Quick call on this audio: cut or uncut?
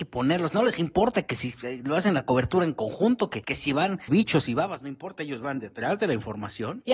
cut